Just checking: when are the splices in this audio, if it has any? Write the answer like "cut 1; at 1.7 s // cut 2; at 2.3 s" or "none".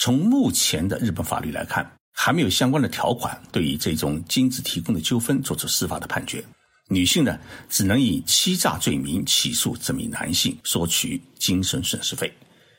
cut 1; at 2.0 s // cut 2; at 6.5 s // cut 3; at 10.6 s